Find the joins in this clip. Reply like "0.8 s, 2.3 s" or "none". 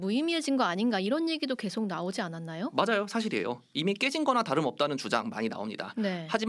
none